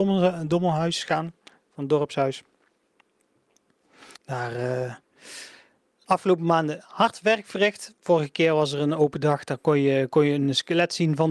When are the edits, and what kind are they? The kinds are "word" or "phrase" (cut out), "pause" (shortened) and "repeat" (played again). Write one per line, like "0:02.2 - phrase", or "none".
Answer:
0:04.2 - pause